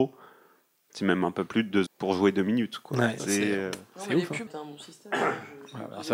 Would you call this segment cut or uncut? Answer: cut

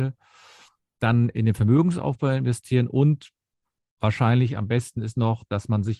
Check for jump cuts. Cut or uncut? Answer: uncut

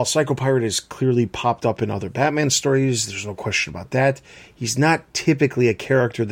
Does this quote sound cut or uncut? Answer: uncut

